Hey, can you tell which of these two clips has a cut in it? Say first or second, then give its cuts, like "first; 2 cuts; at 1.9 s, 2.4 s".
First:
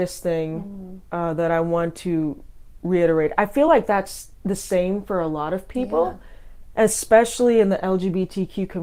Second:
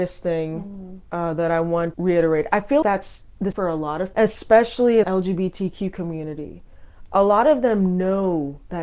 second; 5 cuts; at 1.9 s, 2.8 s, 3.5 s, 4.1 s, 5.0 s